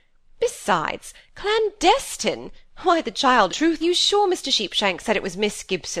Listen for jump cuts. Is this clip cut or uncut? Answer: cut